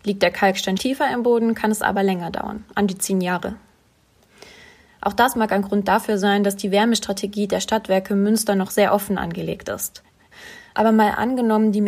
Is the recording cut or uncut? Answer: uncut